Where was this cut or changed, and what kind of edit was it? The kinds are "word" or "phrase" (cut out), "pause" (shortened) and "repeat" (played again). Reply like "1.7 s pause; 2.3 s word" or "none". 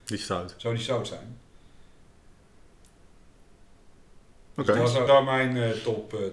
5.1 s word